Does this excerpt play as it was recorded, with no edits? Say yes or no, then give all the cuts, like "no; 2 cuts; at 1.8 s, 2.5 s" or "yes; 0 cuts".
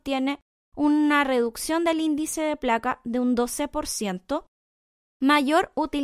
yes; 0 cuts